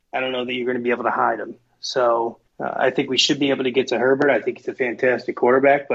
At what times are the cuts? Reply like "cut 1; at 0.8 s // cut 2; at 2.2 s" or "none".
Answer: cut 1; at 2.5 s